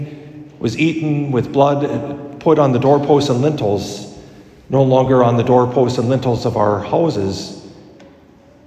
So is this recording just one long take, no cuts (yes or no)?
yes